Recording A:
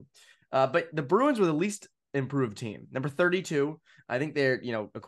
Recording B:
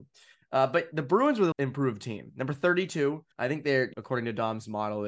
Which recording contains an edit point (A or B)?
B